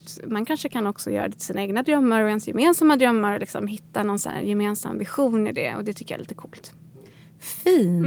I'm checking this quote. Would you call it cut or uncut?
uncut